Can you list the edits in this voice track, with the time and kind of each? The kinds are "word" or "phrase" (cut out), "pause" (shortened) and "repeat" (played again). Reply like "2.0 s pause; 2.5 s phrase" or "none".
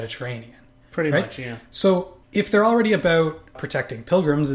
2.2 s pause